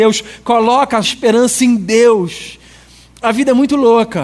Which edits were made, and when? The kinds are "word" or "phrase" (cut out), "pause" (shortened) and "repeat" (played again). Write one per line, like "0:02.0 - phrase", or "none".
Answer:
0:01.0 - word